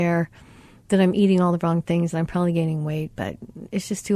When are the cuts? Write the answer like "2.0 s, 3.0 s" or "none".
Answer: none

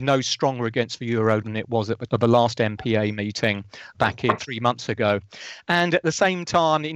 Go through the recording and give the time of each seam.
1.4 s, 2.1 s, 3.9 s, 4.4 s

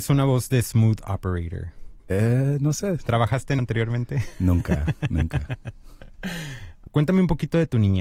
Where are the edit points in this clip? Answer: 2.0 s, 3.6 s

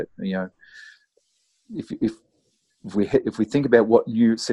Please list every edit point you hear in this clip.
none

